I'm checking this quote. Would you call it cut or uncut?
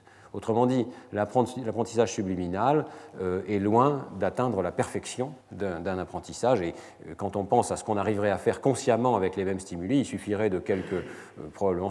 cut